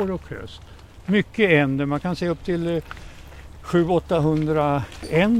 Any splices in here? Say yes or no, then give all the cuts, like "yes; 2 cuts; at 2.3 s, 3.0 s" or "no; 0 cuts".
no; 0 cuts